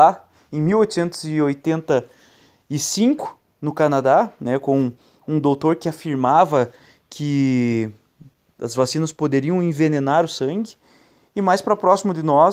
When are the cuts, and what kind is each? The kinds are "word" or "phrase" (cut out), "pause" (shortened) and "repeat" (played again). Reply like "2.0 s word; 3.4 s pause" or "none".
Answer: none